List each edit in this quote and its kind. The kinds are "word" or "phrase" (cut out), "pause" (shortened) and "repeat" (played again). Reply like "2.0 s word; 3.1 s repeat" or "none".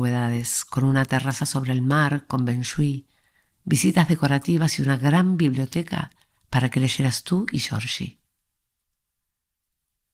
none